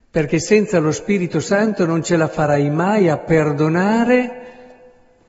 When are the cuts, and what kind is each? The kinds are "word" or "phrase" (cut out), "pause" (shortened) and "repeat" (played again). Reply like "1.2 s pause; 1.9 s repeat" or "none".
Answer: none